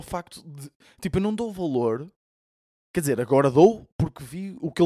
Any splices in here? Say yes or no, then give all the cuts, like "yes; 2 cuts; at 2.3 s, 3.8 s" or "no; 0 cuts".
no; 0 cuts